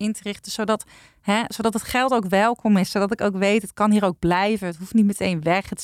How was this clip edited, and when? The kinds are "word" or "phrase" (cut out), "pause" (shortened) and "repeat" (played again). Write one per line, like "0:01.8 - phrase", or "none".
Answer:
none